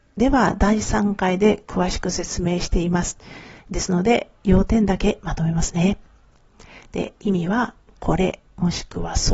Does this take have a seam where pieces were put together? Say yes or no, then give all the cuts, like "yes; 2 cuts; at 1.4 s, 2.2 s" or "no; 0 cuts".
no; 0 cuts